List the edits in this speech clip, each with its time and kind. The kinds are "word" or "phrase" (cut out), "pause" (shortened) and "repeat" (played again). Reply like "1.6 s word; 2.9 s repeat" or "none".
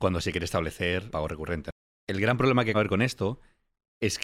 1.1 s word; 2.7 s word